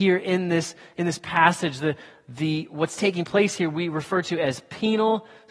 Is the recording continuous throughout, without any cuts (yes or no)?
yes